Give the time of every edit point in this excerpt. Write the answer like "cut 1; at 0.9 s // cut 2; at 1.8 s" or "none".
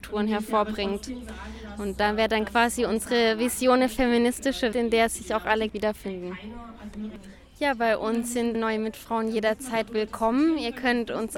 cut 1; at 4.7 s // cut 2; at 5.7 s // cut 3; at 8.5 s